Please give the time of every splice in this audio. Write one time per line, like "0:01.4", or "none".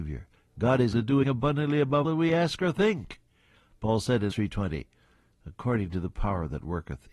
0:00.9
0:01.2
0:02.0
0:04.3

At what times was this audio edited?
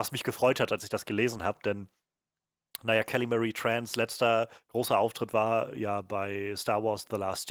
none

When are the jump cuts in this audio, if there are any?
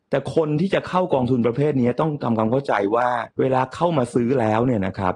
0:03.3

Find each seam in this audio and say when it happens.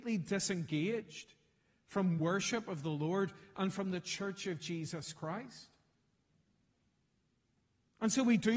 none

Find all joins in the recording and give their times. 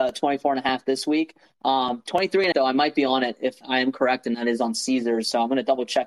0:02.5
0:03.6

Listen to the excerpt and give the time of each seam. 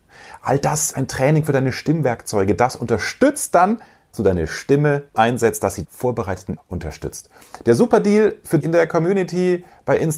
0:00.9
0:04.1
0:05.1
0:05.8
0:06.6
0:08.6

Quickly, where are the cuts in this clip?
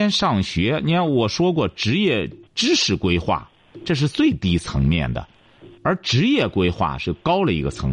0:02.5

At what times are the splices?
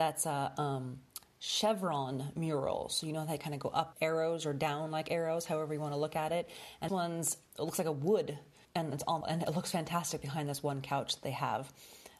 0:03.9
0:06.9
0:08.6
0:09.2

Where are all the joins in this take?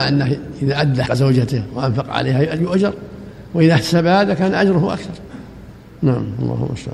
0:01.1

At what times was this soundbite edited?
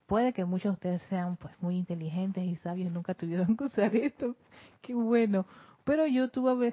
none

